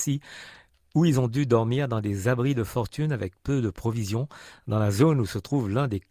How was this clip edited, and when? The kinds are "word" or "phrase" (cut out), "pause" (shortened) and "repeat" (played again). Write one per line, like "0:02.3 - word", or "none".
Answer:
none